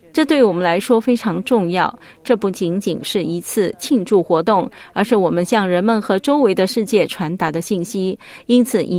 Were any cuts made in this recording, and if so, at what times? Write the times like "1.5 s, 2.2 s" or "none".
none